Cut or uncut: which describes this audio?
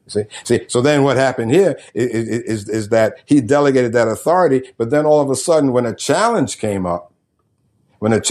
uncut